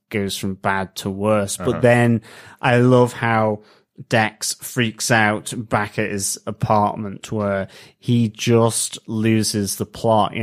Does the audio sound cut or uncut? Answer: uncut